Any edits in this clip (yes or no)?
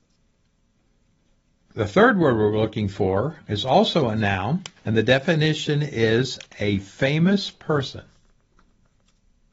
yes